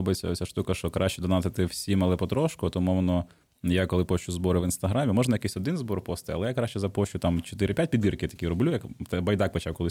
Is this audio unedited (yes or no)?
yes